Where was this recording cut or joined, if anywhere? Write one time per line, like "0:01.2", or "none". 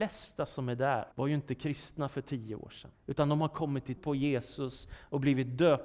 0:01.1
0:02.9
0:04.0

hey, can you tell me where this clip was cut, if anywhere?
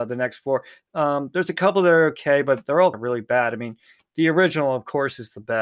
0:02.9

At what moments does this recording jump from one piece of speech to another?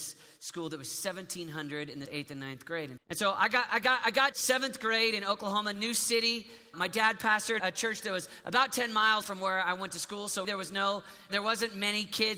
0:02.1
0:03.0
0:04.3
0:06.7
0:07.6
0:09.2
0:10.4
0:11.3

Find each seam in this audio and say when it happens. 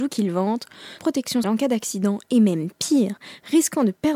0:01.0
0:01.4

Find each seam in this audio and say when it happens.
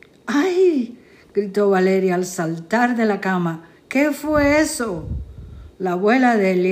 none

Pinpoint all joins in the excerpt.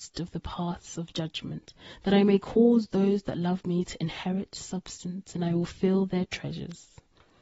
none

